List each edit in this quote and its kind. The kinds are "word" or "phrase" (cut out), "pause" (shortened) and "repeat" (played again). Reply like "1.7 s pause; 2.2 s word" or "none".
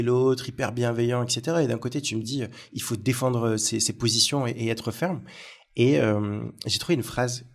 none